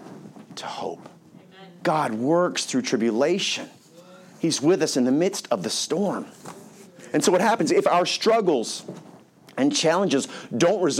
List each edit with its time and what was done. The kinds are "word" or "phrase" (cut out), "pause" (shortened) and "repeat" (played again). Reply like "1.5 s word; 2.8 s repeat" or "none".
none